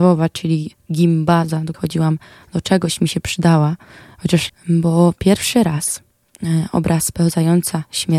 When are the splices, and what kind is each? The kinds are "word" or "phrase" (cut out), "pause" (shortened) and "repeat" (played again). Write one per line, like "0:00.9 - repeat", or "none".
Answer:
0:01.7 - word
0:04.5 - word

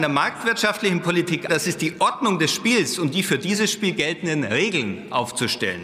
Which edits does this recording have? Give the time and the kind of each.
0:01.5 - word

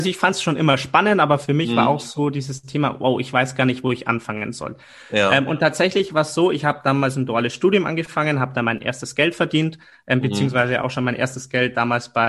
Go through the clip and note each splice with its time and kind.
none

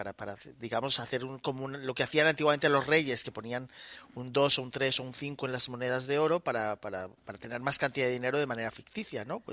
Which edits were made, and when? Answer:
0:07.2 - pause

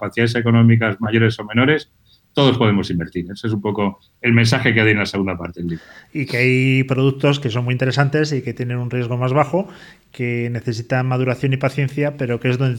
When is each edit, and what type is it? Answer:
none

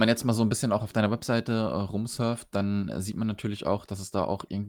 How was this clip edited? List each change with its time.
none

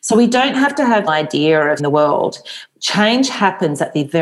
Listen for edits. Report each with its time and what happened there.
0:01.1 - phrase
0:01.8 - word

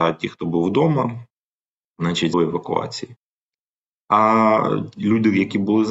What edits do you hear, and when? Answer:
0:02.3 - phrase

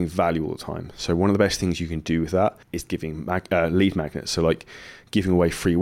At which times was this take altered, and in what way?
0:02.6 - pause

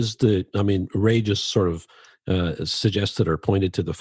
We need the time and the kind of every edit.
none

